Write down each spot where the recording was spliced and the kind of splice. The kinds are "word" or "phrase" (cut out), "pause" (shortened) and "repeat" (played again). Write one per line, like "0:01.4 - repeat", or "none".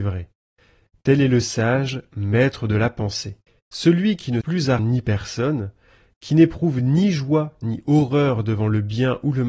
0:03.5 - pause
0:04.4 - word
0:04.8 - word